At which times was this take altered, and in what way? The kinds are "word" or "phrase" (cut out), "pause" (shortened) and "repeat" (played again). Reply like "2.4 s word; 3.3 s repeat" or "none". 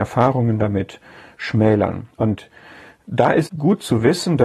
2.1 s pause; 3.5 s word